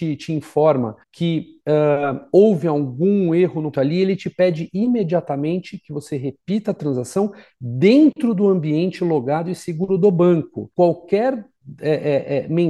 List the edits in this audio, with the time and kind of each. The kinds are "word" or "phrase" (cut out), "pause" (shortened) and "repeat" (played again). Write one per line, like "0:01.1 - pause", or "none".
0:01.0 - pause
0:03.7 - word
0:10.7 - pause